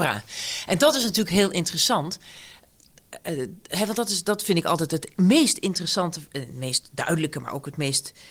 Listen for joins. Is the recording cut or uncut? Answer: uncut